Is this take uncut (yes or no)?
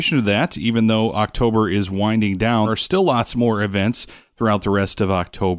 no